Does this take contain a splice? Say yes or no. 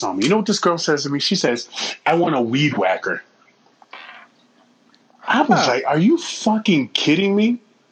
no